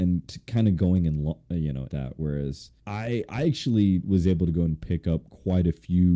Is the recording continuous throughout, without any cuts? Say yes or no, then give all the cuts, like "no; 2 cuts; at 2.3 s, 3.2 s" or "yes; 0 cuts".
no; 2 cuts; at 1.9 s, 2.8 s